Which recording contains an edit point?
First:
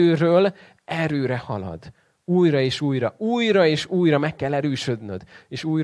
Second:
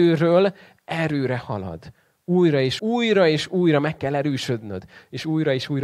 second; 1 cut; at 2.8 s

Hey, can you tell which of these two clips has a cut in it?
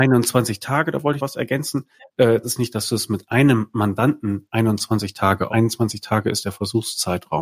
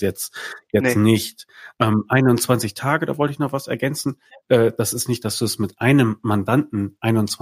first; 3 cuts; at 1.2 s, 2.4 s, 5.5 s

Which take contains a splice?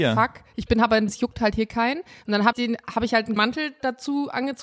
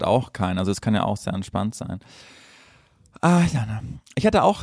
first; 3 cuts; at 1.1 s, 2.5 s, 3.4 s

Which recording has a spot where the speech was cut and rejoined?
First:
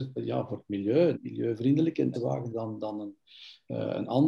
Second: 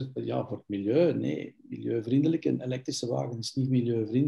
first; 3 cuts; at 1.1 s, 2.1 s, 2.5 s

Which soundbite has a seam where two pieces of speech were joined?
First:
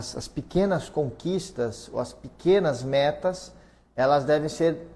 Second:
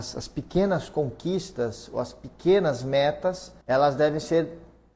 second; 1 cut; at 3.6 s

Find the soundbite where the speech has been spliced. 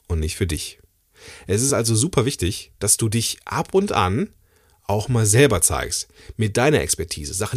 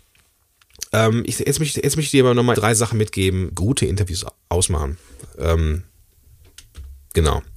second; 3 cuts; at 1.7 s, 2.5 s, 3.5 s

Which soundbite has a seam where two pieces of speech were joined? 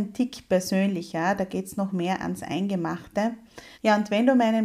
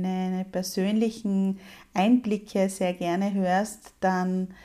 first; 1 cut; at 3.7 s

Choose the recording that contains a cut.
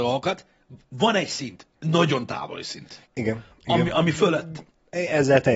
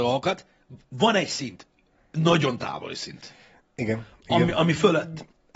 first; 2 cuts; at 1.7 s, 3.0 s

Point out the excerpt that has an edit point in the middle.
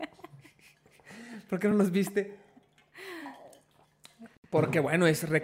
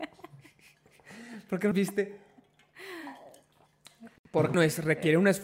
second; 2 cuts; at 1.7 s, 4.5 s

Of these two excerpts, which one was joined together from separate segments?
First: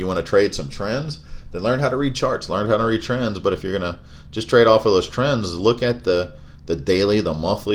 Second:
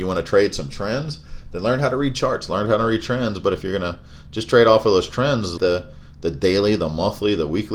second; 1 cut; at 5.6 s

